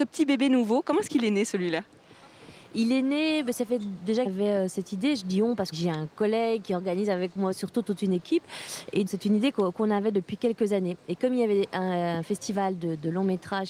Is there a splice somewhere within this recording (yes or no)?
yes